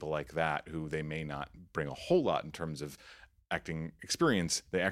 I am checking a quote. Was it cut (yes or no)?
no